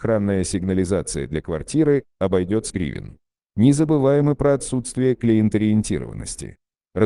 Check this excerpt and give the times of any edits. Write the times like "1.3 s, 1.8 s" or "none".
2.7 s